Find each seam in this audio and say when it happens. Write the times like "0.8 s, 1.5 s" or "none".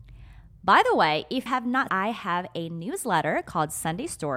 1.5 s, 1.9 s